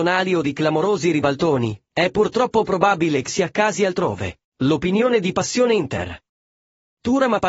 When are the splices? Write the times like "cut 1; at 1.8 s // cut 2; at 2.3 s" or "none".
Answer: cut 1; at 1.8 s // cut 2; at 3.3 s // cut 3; at 4.4 s